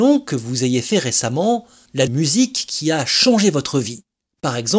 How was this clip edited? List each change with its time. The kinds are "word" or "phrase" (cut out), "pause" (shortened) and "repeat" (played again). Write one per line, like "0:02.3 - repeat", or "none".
0:02.1 - phrase